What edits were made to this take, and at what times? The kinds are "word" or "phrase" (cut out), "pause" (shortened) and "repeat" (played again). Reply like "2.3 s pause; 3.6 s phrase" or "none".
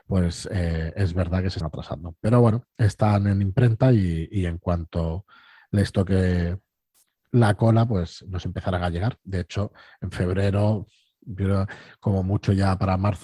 1.6 s word